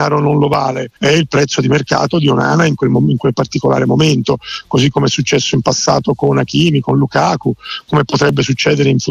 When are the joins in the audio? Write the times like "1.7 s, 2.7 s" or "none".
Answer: 1.0 s